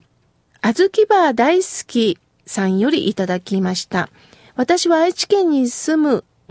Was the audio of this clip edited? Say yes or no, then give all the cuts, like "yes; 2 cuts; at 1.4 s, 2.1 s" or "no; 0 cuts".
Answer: no; 0 cuts